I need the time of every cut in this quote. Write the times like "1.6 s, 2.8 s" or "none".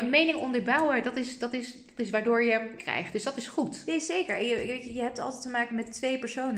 2.8 s